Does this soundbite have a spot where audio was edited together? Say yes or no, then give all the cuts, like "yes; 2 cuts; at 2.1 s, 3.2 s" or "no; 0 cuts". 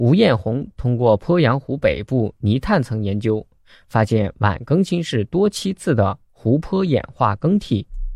no; 0 cuts